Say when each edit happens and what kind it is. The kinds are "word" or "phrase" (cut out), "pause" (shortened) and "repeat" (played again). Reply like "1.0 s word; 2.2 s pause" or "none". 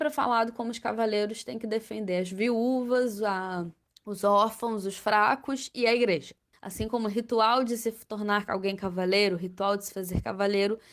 3.8 s pause; 6.5 s pause